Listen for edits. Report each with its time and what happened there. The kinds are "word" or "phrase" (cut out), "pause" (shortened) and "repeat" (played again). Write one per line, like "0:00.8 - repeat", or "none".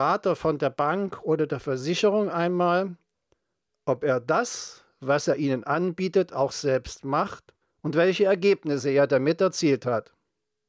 0:07.6 - pause